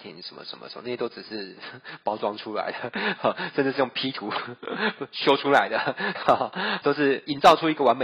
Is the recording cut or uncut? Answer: cut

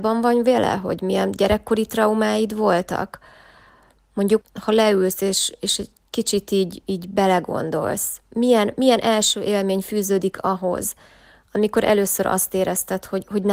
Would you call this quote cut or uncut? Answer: cut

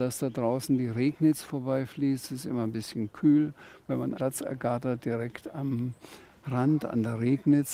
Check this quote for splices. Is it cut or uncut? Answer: cut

